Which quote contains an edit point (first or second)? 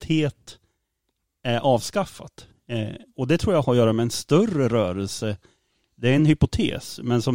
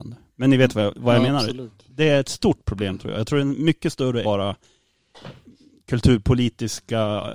second